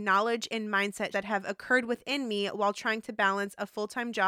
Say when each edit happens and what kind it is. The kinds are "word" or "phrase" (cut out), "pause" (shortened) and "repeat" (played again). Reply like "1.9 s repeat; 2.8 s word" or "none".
1.1 s word